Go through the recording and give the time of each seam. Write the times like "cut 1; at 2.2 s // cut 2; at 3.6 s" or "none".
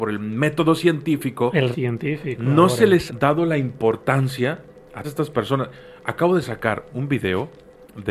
cut 1; at 1.7 s // cut 2; at 3.1 s // cut 3; at 5.0 s // cut 4; at 6.9 s